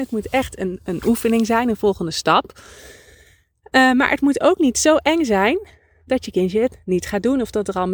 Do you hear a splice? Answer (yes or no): no